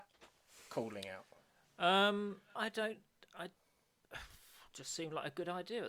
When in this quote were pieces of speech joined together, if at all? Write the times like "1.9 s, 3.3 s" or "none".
2.6 s